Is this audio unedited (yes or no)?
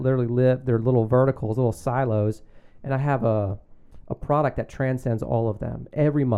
yes